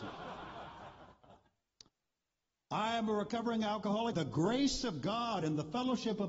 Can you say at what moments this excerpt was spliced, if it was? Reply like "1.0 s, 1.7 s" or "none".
4.1 s